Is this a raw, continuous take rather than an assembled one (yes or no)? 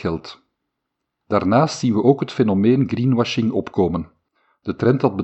yes